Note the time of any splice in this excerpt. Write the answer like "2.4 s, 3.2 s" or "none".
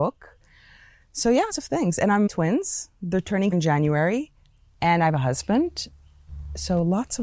1.5 s, 2.3 s, 3.5 s